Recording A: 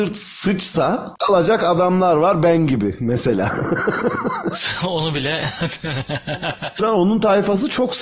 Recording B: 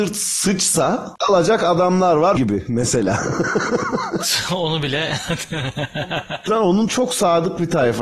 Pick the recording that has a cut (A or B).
B